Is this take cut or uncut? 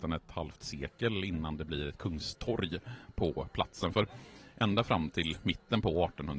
uncut